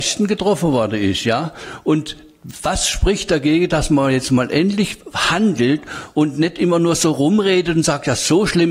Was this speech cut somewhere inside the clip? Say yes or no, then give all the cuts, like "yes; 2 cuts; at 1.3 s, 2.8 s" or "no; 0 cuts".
no; 0 cuts